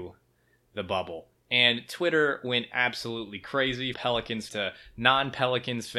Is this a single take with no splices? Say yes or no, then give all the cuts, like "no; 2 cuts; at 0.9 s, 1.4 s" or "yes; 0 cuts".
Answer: no; 2 cuts; at 3.9 s, 4.5 s